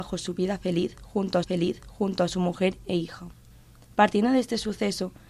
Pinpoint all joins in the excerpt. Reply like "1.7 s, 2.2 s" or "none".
1.4 s